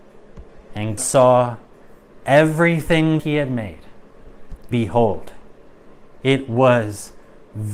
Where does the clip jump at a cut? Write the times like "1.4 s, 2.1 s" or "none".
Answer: 1.0 s, 3.2 s, 4.7 s